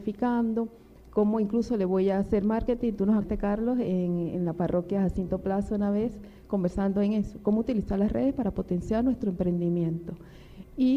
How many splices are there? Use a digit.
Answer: 0